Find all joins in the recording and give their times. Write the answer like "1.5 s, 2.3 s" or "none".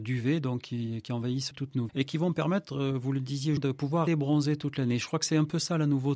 1.5 s, 1.9 s, 3.6 s, 4.1 s